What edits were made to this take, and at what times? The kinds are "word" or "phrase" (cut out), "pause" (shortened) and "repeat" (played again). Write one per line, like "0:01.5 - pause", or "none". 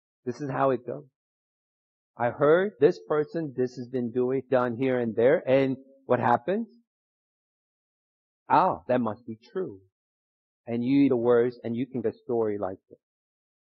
0:02.8 - word
0:04.5 - word
0:11.1 - word
0:12.0 - word